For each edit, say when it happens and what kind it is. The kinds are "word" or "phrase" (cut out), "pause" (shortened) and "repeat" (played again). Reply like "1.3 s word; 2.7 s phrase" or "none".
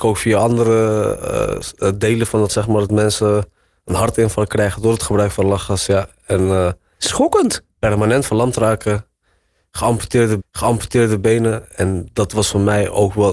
2.5 s word; 10.4 s repeat